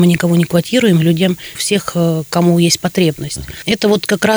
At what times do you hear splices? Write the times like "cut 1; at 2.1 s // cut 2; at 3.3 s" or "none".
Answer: cut 1; at 1.6 s